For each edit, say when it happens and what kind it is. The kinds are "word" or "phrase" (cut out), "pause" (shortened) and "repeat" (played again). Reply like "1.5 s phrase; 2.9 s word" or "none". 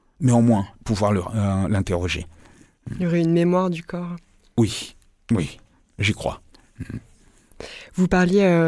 none